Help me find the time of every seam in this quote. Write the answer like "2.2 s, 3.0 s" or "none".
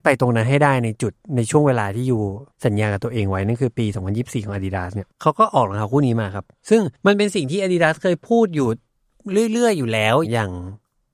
2.5 s, 5.1 s, 7.0 s